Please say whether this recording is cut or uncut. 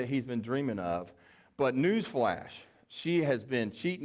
uncut